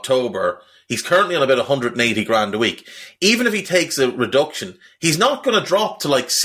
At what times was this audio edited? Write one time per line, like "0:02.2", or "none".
none